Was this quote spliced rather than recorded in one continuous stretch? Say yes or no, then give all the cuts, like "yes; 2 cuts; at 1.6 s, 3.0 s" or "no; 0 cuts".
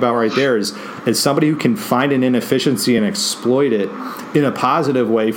no; 0 cuts